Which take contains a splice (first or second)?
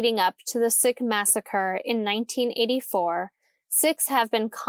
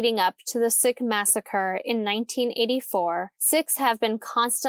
second